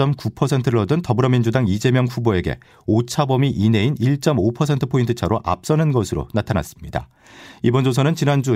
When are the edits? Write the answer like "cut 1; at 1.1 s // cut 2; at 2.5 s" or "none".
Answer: none